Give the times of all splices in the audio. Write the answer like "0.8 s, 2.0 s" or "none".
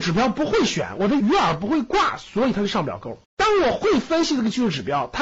3.3 s